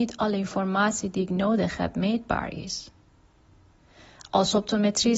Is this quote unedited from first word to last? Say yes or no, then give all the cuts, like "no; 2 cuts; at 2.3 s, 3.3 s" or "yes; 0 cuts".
yes; 0 cuts